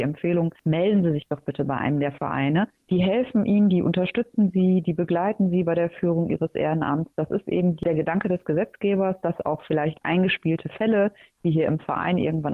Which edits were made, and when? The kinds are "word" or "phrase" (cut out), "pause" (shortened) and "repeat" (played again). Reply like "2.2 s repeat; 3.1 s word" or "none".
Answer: none